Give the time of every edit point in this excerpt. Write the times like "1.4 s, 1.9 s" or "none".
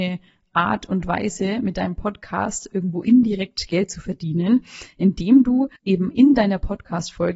5.8 s